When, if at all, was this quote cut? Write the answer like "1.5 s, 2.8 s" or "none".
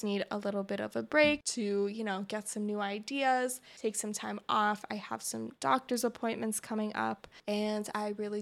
none